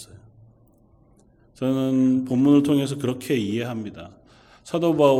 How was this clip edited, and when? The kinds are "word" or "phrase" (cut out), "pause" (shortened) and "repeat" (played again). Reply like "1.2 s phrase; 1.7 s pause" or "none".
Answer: none